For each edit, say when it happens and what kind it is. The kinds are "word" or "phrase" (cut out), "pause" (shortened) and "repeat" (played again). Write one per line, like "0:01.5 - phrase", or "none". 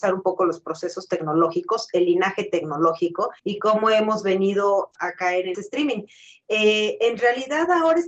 0:03.4 - pause
0:04.9 - word
0:05.5 - phrase